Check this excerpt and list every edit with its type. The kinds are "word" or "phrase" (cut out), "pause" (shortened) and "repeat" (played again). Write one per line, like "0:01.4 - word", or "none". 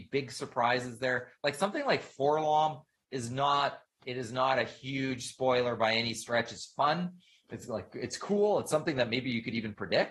none